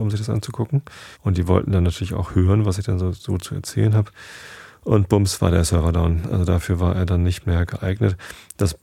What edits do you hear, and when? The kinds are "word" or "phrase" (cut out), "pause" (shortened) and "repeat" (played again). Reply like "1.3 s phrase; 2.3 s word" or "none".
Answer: 1.1 s pause